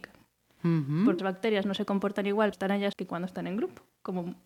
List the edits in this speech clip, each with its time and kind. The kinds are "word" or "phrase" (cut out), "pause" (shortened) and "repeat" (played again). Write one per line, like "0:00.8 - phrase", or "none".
0:01.2 - word
0:02.5 - word
0:02.9 - word